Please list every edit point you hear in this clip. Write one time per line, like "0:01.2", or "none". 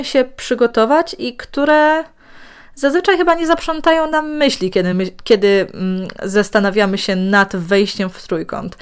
none